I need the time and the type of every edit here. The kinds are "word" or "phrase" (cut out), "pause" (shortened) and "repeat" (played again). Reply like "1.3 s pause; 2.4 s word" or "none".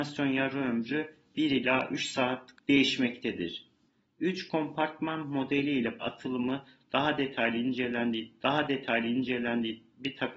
2.6 s word; 6.0 s phrase; 8.4 s repeat